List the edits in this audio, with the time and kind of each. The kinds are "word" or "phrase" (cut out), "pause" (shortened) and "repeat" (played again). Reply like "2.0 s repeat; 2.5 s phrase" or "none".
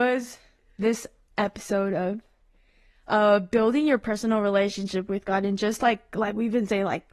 none